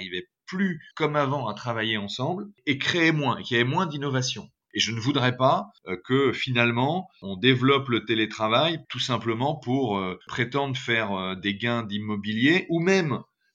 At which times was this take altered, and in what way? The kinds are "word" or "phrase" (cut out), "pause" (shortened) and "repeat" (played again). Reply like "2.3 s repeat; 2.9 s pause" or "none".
0.9 s pause; 8.8 s pause; 10.2 s pause